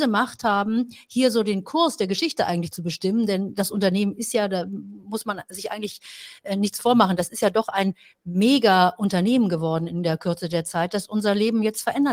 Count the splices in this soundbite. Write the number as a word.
zero